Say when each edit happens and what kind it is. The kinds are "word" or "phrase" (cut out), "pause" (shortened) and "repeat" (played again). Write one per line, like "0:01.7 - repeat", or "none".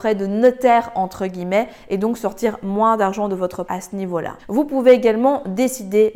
0:03.7 - word
0:04.4 - pause